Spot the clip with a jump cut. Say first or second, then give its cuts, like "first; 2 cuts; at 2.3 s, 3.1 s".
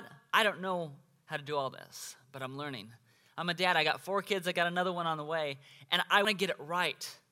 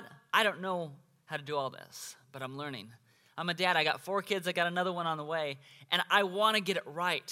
first; 1 cut; at 6.2 s